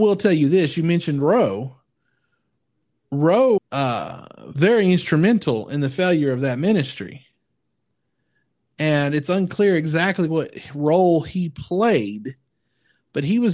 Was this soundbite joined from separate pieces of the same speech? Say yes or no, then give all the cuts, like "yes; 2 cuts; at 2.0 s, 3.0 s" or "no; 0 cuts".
yes; 1 cut; at 3.6 s